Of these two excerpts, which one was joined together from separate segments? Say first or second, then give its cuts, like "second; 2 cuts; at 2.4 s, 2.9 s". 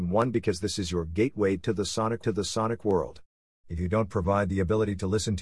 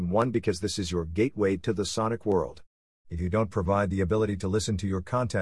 first; 1 cut; at 2.2 s